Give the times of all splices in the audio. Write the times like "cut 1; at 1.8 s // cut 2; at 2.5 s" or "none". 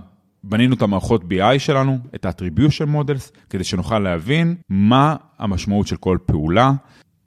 cut 1; at 4.6 s